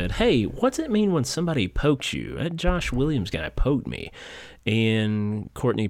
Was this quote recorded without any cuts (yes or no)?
yes